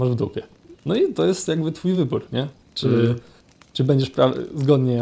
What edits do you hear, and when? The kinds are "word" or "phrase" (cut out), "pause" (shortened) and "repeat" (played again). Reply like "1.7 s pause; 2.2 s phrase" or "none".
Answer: none